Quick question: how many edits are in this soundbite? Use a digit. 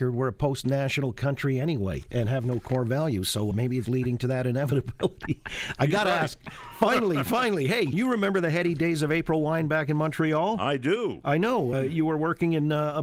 4